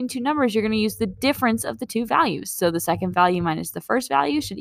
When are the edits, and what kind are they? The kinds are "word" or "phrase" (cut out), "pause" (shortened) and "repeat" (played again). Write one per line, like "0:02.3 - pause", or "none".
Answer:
none